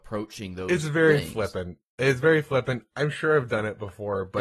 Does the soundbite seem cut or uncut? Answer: uncut